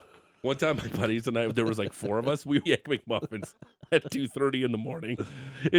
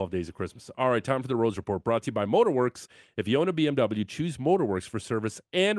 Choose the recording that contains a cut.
first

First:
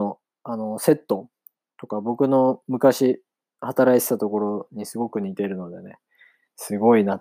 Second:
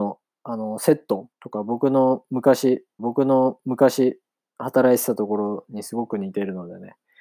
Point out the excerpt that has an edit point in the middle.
second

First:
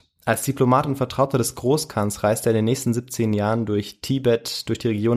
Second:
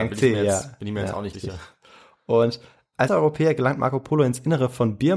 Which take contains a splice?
second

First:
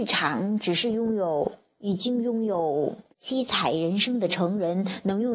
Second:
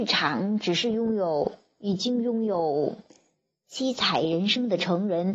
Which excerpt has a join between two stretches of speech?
first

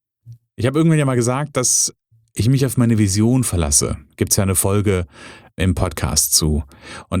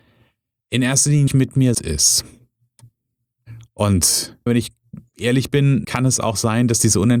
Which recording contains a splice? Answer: second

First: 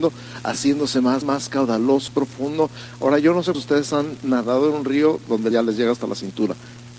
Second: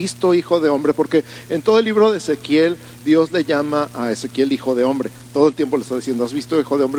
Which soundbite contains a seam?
first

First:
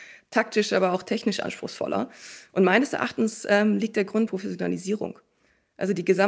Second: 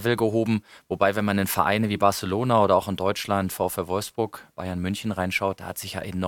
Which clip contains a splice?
first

